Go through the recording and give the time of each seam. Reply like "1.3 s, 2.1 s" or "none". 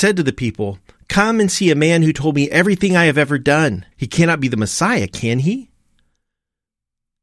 3.9 s